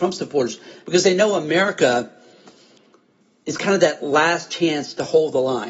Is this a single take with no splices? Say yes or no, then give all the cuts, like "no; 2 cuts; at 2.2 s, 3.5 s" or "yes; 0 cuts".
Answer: yes; 0 cuts